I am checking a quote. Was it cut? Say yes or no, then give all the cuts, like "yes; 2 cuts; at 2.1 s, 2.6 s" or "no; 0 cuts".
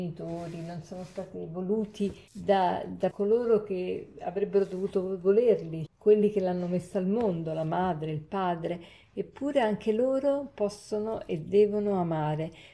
yes; 3 cuts; at 2.3 s, 3.1 s, 5.9 s